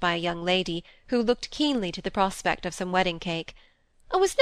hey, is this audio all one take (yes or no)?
yes